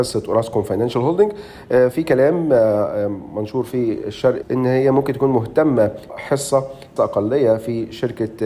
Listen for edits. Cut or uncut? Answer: cut